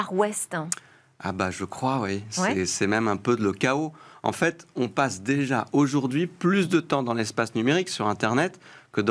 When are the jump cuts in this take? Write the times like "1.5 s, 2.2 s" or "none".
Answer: none